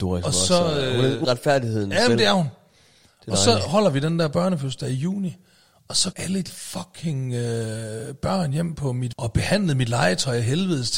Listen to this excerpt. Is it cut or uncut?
cut